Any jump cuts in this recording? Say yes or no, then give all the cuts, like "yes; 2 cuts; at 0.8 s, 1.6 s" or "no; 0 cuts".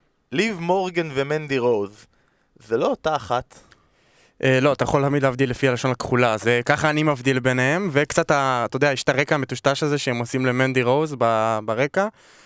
no; 0 cuts